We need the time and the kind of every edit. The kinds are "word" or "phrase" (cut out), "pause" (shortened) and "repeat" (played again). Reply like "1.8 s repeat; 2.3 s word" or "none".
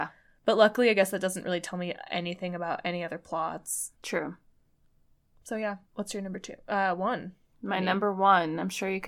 3.9 s pause; 5.9 s pause